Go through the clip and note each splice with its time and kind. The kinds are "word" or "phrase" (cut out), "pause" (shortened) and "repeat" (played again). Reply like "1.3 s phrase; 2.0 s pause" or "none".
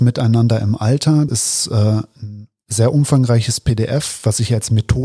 1.3 s word